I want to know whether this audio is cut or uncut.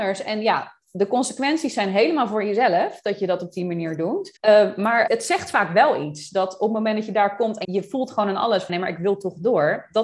cut